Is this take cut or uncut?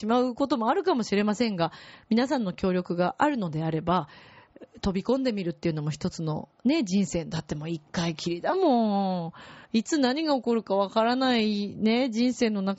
cut